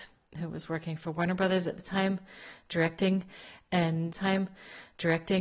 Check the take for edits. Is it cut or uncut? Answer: cut